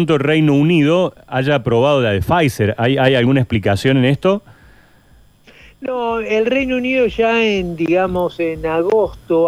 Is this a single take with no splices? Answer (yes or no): yes